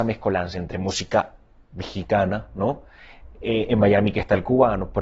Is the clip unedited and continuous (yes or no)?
yes